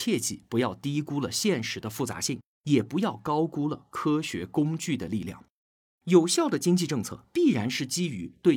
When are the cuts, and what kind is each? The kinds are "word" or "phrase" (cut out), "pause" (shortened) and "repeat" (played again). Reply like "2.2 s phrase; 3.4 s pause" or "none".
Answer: none